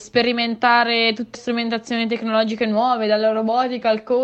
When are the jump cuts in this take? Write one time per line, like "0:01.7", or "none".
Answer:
0:01.3